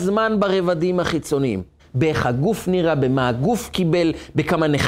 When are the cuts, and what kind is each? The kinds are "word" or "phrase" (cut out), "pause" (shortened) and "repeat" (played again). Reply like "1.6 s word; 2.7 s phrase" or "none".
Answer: 1.8 s pause